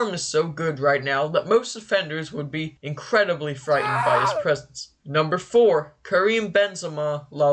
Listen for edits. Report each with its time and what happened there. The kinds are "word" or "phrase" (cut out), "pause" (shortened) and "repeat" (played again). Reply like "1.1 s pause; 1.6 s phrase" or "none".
5.0 s pause